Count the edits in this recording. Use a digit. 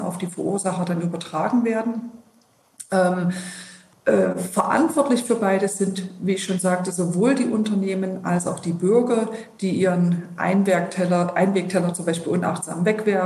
1